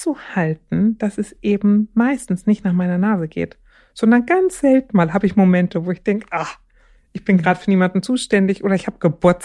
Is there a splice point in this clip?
no; 0 cuts

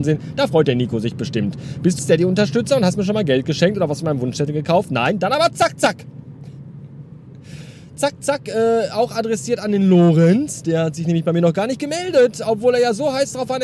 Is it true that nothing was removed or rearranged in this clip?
no; 1 cut; at 2.0 s

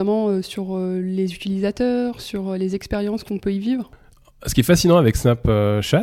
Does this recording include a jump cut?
no; 0 cuts

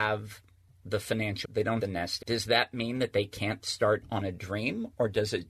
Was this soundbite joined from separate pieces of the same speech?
yes; 3 cuts; at 1.4 s, 1.8 s, 2.2 s

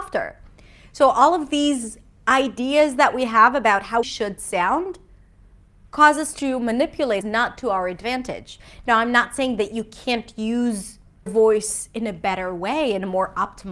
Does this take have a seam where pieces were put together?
yes; 3 cuts; at 4.0 s, 7.2 s, 11.3 s

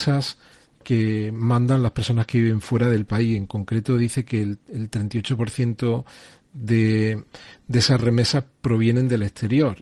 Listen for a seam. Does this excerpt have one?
no; 0 cuts

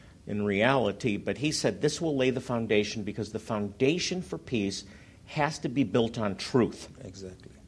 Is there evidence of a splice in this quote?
no; 0 cuts

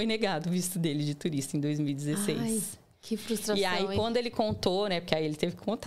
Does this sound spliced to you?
no; 0 cuts

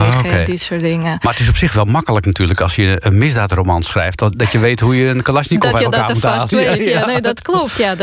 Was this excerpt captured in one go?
yes; 0 cuts

